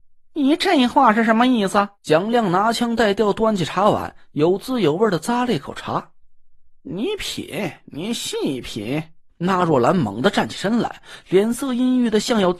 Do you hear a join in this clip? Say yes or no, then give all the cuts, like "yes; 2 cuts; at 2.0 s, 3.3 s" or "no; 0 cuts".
yes; 4 cuts; at 1.9 s, 6.8 s, 7.8 s, 9.3 s